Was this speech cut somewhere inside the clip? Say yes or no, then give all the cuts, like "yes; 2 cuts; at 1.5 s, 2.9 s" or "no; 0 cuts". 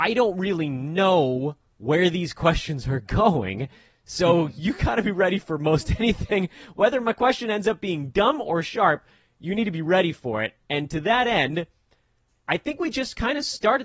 no; 0 cuts